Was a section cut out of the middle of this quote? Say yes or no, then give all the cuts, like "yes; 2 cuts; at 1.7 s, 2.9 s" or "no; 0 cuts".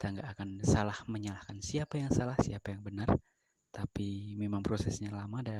no; 0 cuts